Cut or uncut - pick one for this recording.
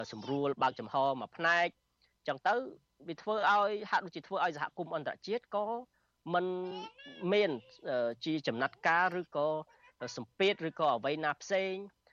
uncut